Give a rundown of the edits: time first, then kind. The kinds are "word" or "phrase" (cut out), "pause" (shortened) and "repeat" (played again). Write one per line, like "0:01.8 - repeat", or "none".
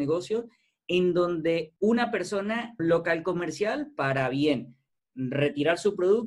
0:01.8 - pause
0:02.8 - phrase